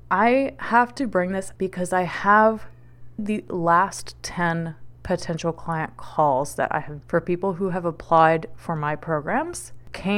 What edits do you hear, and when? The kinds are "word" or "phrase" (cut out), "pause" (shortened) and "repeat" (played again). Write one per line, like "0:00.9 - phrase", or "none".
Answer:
0:01.6 - word
0:03.2 - word
0:07.0 - word